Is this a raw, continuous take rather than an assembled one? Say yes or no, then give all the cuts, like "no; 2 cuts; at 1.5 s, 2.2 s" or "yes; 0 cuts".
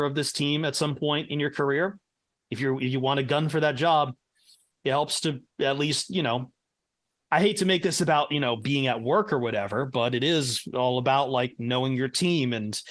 yes; 0 cuts